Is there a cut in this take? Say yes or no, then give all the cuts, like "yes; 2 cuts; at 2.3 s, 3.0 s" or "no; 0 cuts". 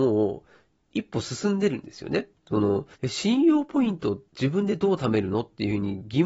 yes; 2 cuts; at 2.9 s, 4.3 s